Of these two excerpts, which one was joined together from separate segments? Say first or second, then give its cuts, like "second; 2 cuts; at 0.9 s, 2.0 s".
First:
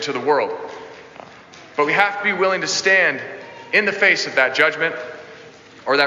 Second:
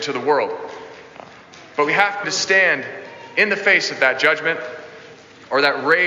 second; 1 cut; at 2.2 s